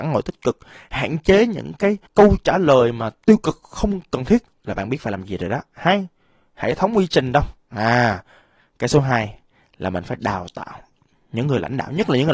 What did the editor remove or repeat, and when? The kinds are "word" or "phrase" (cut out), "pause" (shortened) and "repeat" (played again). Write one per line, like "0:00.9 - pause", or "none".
0:02.1 - pause
0:04.5 - phrase